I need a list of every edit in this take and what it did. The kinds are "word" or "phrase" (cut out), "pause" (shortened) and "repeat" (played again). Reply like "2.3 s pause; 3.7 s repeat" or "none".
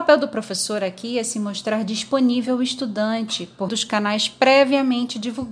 3.7 s word